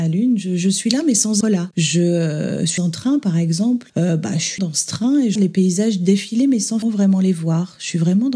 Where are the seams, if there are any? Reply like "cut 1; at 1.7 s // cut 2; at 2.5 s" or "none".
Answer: cut 1; at 1.4 s // cut 2; at 2.8 s // cut 3; at 3.9 s // cut 4; at 4.6 s // cut 5; at 5.4 s // cut 6; at 6.8 s